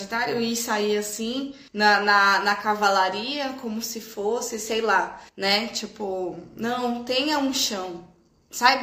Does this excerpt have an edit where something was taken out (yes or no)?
yes